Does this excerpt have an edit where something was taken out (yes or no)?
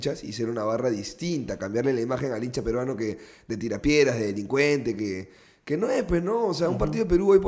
no